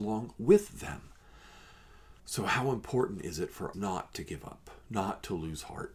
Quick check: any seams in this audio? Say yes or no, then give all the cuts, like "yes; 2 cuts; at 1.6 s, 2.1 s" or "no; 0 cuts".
yes; 3 cuts; at 2.2 s, 3.7 s, 4.8 s